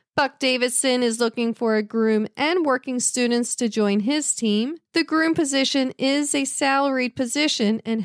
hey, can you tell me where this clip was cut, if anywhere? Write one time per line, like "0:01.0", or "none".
0:04.8

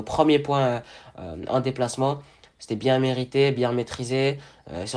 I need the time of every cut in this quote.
none

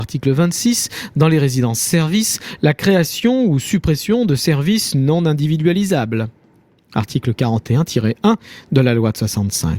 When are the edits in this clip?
none

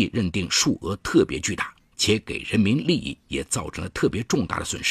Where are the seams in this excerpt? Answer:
0:01.8
0:03.2

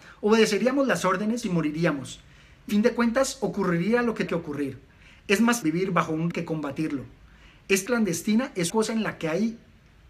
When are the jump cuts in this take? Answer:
0:01.4
0:02.7
0:04.3
0:05.6
0:06.3
0:07.9
0:08.7

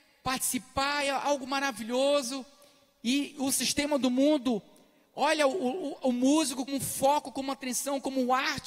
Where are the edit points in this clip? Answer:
0:06.7

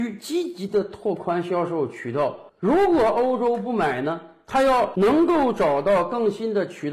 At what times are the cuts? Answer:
0:02.5

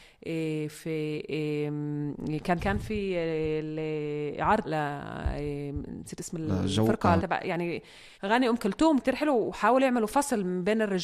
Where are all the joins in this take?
0:02.6
0:04.6
0:07.2
0:08.1
0:09.0

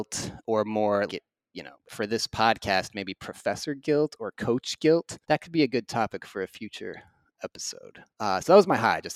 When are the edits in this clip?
0:01.1
0:01.9
0:05.2
0:08.1

